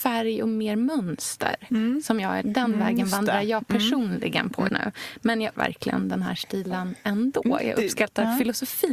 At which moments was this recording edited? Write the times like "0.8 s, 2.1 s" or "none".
2.4 s, 4.7 s, 5.6 s